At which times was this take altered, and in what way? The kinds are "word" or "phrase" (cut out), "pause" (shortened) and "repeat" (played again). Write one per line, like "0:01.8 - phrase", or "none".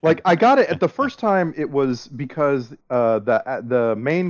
0:02.8 - pause